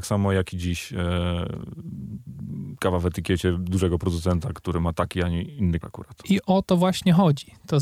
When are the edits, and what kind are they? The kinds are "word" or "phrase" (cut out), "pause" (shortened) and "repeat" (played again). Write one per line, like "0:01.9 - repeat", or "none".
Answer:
0:05.8 - word